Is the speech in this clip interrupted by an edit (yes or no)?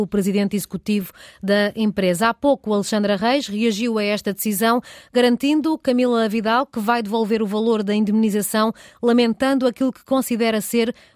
no